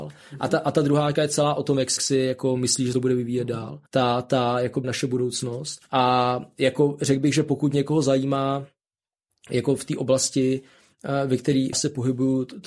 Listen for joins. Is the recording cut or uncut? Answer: cut